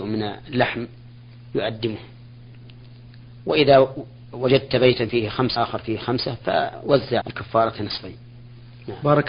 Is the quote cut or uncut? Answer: cut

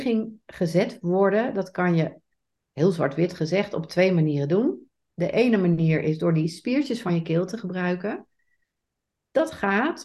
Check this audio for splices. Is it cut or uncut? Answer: uncut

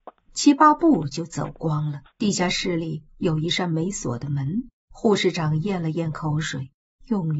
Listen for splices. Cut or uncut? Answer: cut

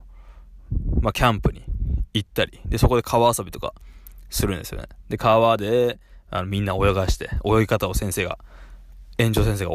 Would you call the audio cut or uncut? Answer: uncut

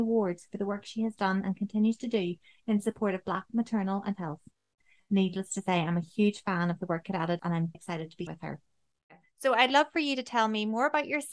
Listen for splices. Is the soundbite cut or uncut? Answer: cut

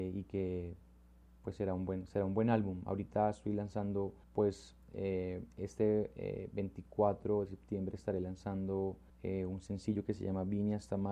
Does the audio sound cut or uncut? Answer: cut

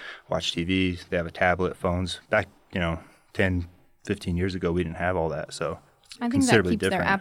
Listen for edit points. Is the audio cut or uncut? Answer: uncut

